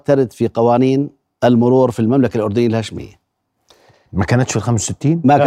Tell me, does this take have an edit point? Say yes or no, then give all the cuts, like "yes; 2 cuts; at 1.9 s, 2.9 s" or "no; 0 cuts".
no; 0 cuts